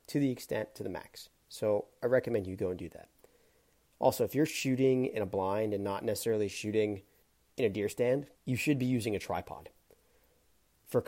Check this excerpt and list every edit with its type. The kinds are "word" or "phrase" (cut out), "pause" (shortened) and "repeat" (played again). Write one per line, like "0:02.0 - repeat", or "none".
0:07.2 - pause
0:08.3 - pause